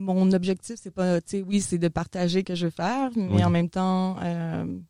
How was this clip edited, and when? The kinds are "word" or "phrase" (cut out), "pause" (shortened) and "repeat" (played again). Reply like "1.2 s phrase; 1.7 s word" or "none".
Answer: 2.4 s word